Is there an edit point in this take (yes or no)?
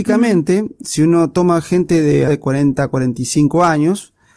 yes